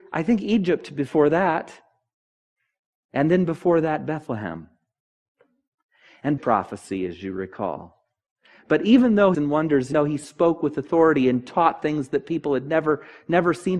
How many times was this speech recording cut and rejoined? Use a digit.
3